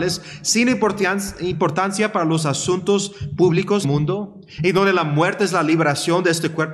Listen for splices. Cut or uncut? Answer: cut